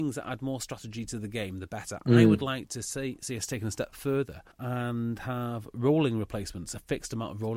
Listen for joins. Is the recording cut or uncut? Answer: cut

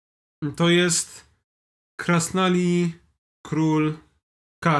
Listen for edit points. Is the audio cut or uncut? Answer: uncut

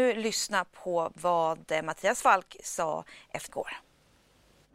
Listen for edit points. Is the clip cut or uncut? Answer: cut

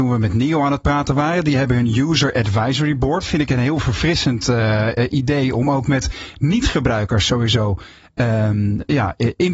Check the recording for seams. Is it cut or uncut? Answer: uncut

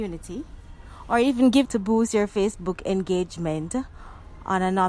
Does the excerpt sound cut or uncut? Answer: cut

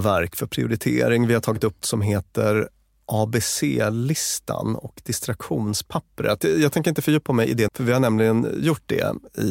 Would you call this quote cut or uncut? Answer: cut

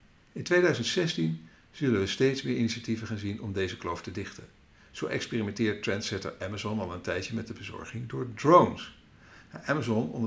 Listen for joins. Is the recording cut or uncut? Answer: uncut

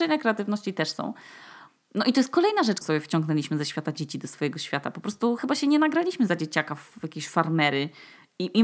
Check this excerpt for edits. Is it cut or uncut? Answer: cut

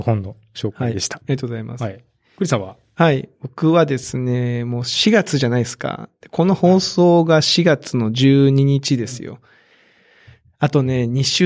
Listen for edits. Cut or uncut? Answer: uncut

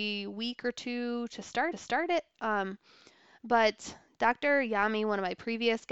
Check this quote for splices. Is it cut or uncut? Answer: cut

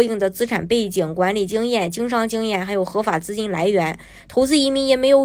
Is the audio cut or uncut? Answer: uncut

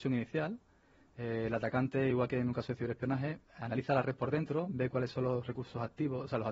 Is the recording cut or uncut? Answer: uncut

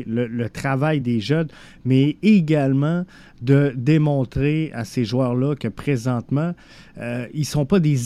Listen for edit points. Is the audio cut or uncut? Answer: uncut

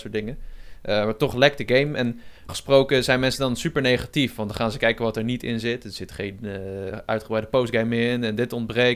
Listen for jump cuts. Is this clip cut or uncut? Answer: cut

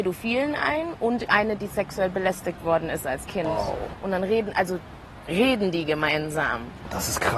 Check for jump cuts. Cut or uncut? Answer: uncut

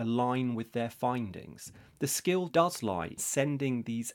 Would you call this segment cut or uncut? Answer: cut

